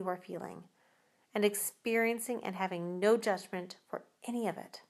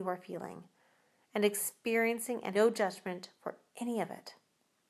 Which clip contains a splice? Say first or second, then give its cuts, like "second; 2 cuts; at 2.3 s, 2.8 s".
second; 1 cut; at 2.5 s